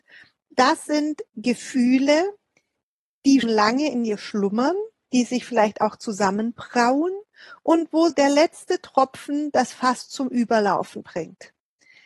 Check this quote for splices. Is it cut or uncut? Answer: cut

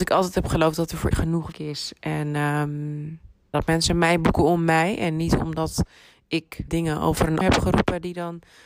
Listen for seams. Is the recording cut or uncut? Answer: cut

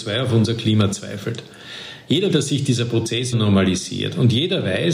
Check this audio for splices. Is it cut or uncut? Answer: cut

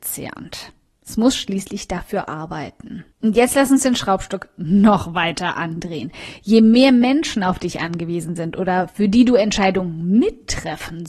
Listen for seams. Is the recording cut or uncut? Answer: cut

